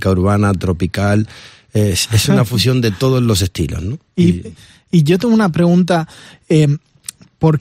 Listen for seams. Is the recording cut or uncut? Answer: uncut